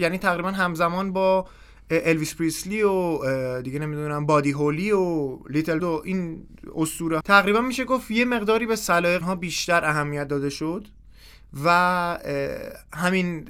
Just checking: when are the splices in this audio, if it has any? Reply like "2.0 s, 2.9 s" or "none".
5.8 s, 7.2 s, 9.2 s